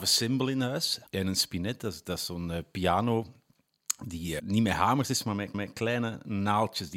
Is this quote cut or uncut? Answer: cut